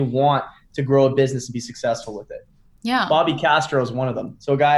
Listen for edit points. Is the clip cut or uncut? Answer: uncut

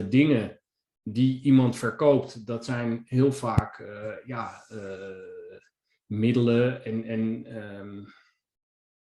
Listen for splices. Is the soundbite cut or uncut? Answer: uncut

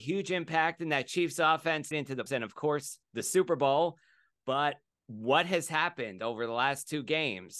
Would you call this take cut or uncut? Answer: cut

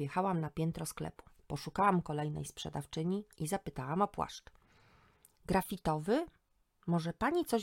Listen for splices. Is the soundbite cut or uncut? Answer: cut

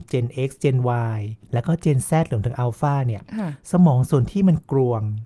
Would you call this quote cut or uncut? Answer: cut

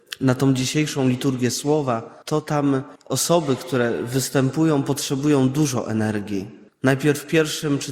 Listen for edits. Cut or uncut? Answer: cut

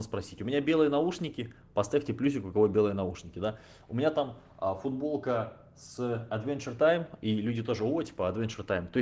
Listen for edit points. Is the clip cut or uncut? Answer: uncut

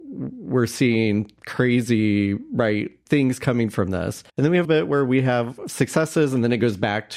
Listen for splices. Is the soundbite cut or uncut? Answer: cut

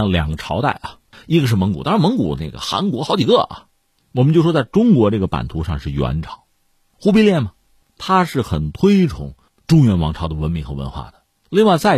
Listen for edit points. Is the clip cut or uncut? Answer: uncut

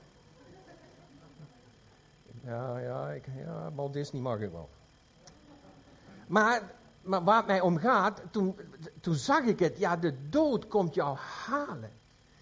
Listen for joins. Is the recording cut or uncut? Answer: uncut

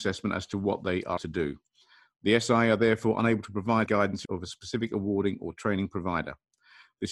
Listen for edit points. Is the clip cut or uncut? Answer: cut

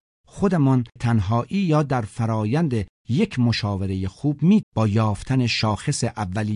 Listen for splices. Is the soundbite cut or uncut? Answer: cut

